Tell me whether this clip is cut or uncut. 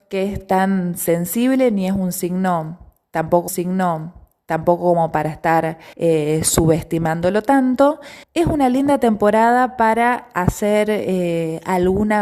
cut